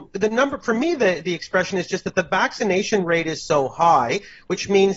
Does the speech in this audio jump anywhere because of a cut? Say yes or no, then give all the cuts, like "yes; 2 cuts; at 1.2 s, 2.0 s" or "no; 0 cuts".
no; 0 cuts